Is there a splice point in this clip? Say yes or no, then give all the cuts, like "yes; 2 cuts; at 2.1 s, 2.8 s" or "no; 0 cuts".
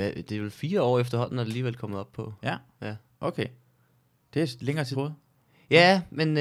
yes; 1 cut; at 4.9 s